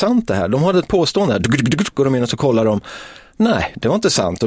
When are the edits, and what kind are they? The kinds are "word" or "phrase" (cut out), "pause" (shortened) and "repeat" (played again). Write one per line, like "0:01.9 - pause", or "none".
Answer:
none